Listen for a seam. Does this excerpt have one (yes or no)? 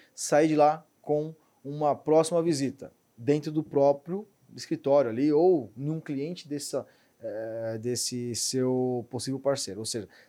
no